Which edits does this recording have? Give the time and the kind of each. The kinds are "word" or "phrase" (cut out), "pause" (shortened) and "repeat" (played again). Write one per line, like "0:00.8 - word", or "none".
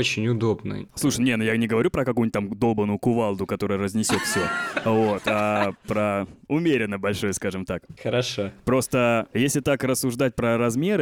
none